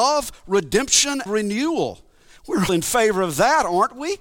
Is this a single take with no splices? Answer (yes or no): no